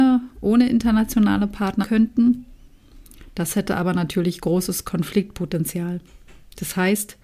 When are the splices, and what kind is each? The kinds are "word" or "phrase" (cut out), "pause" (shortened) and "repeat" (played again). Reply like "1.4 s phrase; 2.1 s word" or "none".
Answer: 1.8 s word